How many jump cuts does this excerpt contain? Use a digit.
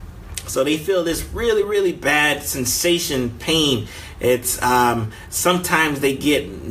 0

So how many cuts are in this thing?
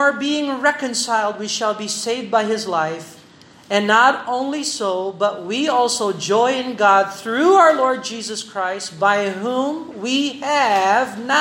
0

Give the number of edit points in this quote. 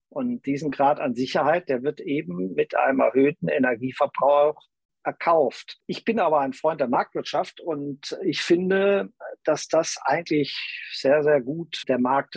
0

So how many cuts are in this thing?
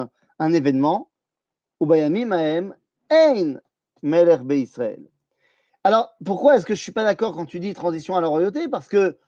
0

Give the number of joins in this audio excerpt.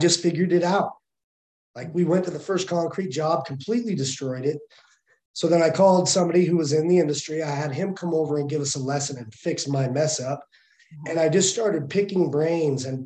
0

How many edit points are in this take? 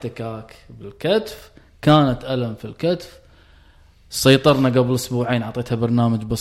0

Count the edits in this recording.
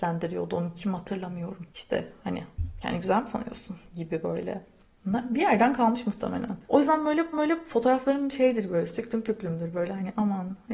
4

